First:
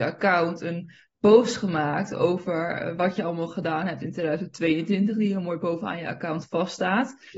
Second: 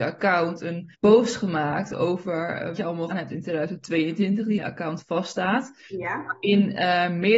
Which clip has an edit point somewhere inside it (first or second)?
second